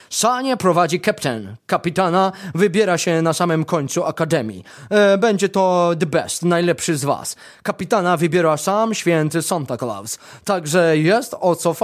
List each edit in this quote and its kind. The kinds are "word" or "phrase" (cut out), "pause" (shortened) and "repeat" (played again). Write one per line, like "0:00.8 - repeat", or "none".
none